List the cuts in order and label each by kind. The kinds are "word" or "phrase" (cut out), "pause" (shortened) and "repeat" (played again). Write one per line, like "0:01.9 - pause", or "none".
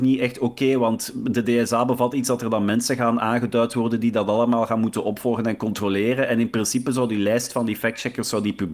none